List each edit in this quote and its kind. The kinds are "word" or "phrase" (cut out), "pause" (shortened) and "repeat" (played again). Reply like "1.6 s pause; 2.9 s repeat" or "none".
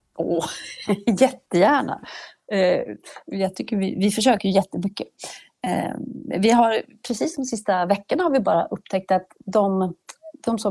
none